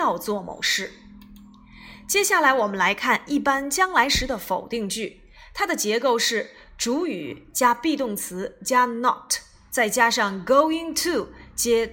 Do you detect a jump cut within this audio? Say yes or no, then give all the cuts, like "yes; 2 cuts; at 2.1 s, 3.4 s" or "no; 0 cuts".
no; 0 cuts